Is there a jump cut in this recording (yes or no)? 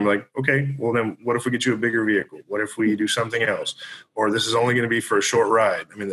no